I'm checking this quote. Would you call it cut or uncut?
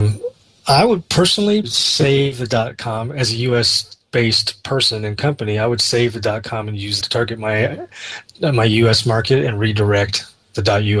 cut